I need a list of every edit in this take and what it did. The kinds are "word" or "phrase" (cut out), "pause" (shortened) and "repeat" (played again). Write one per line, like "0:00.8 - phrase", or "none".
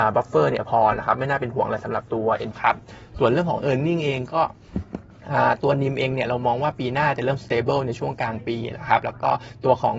0:02.5 - word